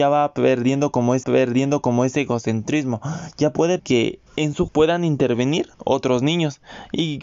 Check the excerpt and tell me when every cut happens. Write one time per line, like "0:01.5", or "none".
0:01.2
0:03.8
0:04.3
0:04.7
0:05.7